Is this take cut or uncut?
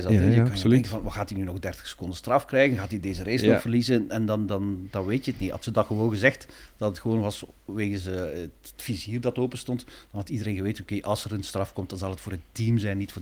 uncut